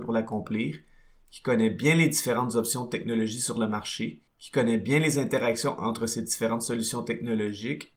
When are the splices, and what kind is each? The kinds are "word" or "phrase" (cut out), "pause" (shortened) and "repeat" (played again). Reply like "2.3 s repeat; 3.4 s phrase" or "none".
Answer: 4.3 s pause

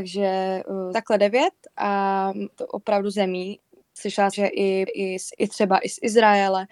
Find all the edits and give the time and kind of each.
0.9 s word; 2.5 s word; 3.1 s word; 4.3 s word; 4.9 s word; 5.3 s word

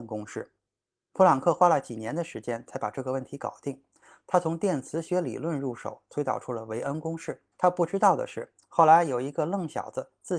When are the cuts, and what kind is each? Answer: 7.5 s pause

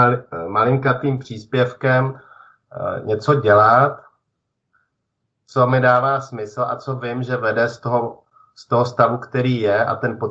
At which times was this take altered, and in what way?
none

